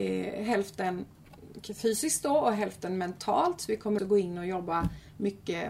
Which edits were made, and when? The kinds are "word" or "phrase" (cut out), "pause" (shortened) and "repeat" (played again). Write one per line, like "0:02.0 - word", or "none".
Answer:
0:04.0 - word